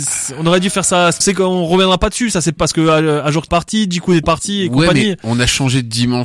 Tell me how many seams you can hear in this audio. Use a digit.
4